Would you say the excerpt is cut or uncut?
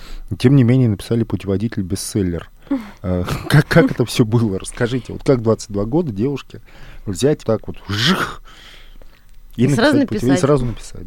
cut